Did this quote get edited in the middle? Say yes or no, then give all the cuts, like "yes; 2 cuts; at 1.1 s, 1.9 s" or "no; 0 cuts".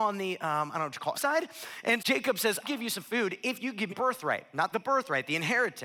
yes; 5 cuts; at 1.1 s, 2.0 s, 2.6 s, 3.9 s, 4.7 s